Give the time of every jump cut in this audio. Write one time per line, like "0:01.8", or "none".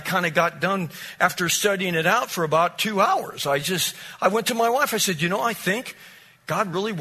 none